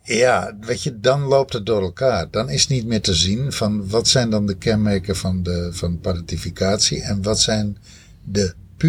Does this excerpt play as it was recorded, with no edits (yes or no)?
yes